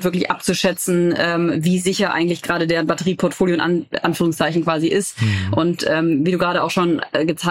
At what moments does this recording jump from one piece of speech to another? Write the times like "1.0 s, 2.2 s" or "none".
none